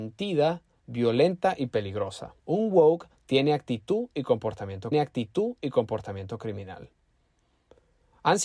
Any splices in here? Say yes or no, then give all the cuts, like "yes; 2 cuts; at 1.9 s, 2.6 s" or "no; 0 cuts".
yes; 2 cuts; at 2.4 s, 4.9 s